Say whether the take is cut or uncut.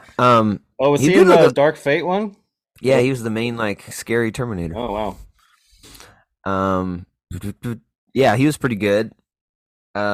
uncut